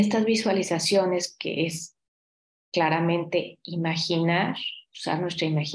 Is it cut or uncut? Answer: uncut